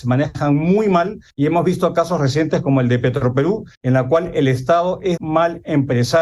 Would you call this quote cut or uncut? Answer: cut